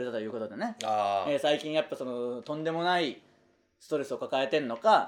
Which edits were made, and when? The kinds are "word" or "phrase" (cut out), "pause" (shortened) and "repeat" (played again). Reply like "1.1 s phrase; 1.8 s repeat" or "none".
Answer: none